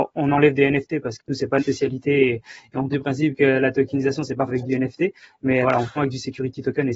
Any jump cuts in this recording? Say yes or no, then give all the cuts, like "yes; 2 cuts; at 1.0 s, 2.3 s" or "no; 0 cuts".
yes; 6 cuts; at 1.2 s, 1.6 s, 2.9 s, 4.5 s, 5.6 s, 6.0 s